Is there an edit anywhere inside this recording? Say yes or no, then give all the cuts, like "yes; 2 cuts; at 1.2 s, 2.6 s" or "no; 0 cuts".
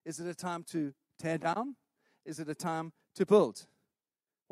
no; 0 cuts